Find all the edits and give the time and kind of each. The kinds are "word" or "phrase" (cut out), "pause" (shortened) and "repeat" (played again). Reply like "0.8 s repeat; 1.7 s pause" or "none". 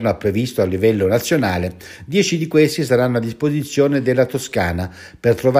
none